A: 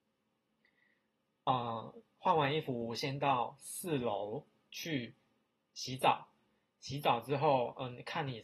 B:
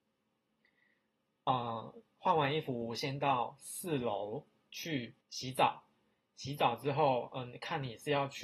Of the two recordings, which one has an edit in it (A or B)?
B